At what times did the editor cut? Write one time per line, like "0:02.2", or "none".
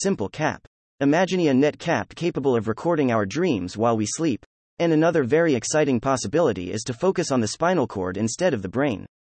none